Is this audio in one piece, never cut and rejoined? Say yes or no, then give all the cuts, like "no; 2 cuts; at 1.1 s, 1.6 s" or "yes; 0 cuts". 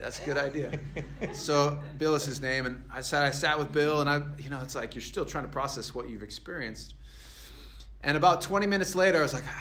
yes; 0 cuts